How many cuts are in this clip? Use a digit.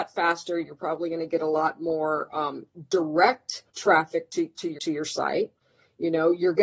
2